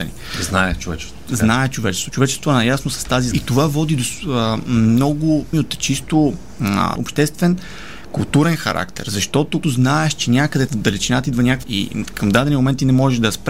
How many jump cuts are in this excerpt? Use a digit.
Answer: 6